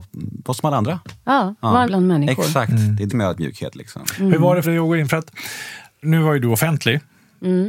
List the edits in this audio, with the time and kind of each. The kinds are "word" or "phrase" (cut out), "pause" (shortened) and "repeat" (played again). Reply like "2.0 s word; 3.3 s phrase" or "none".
1.9 s word; 3.1 s word; 4.6 s word; 6.0 s word